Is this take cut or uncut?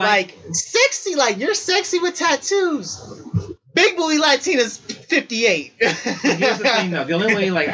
uncut